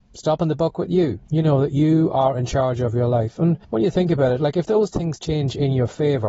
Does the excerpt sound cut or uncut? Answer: cut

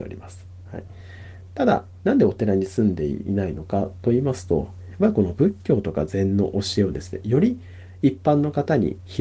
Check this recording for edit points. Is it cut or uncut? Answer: uncut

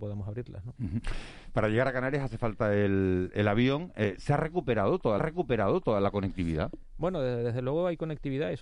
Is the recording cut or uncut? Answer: cut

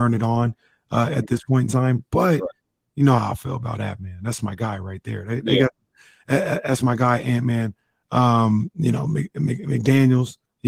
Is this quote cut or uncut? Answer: uncut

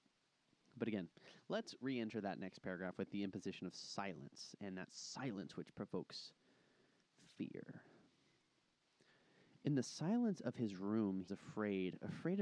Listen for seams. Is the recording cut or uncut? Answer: cut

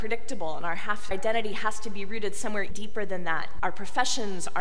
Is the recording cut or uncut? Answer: cut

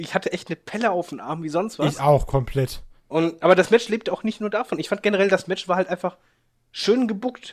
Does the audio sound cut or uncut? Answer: cut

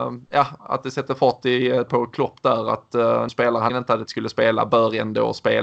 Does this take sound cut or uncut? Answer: cut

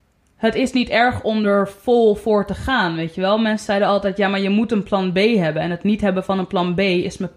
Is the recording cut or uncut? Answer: uncut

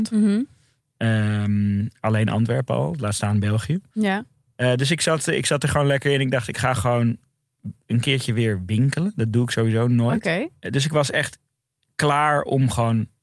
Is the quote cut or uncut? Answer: uncut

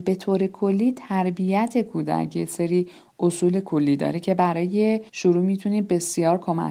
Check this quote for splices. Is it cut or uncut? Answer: cut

